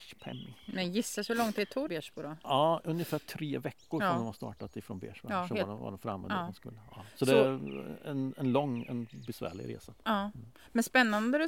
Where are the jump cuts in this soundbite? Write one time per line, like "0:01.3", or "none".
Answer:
0:01.9